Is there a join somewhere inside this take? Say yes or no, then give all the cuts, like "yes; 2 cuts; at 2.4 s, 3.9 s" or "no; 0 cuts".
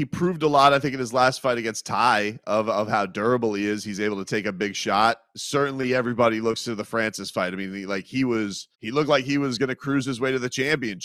yes; 1 cut; at 8.7 s